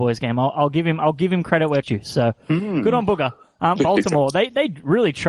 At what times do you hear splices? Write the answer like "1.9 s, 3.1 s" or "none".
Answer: 1.8 s, 3.8 s